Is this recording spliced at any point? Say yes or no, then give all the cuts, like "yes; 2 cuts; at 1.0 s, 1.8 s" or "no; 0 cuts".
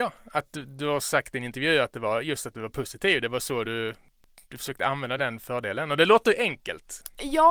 no; 0 cuts